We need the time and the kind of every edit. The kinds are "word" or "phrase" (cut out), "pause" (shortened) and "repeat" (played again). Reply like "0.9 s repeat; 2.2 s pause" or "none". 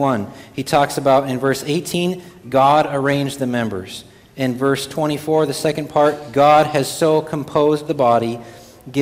none